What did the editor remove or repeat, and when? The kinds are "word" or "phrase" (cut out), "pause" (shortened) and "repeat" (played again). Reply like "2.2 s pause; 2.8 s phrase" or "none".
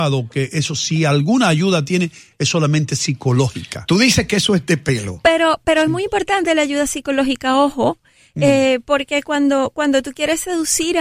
none